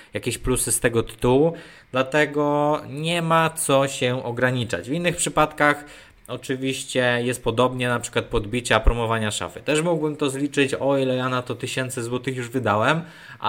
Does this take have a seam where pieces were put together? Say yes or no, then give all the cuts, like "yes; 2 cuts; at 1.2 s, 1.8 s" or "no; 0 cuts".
no; 0 cuts